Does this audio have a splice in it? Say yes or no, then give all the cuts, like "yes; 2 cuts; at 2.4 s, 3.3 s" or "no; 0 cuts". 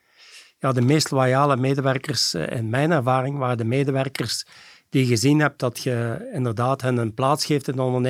no; 0 cuts